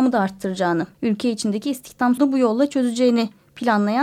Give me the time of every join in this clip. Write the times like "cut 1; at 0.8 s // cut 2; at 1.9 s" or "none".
cut 1; at 0.9 s // cut 2; at 2.2 s